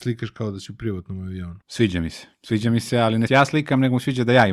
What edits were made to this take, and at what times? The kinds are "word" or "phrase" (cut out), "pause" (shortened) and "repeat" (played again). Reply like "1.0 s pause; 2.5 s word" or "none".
1.6 s pause; 3.3 s phrase